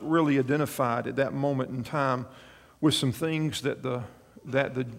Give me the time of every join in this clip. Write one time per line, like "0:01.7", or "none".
none